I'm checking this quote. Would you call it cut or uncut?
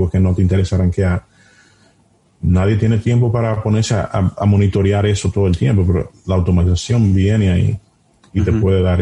uncut